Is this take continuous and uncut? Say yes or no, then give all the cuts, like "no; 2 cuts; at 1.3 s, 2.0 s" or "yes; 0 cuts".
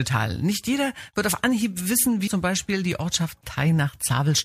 no; 2 cuts; at 2.3 s, 3.4 s